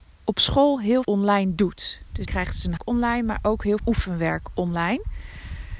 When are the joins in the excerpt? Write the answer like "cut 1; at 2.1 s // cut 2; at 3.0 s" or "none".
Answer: cut 1; at 1.0 s // cut 2; at 2.2 s // cut 3; at 2.8 s // cut 4; at 3.8 s